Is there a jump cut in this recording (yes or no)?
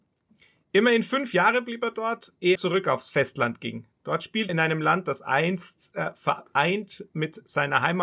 yes